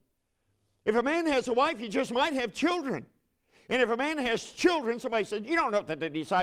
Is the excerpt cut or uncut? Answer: uncut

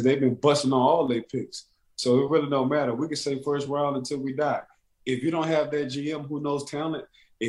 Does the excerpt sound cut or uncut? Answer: uncut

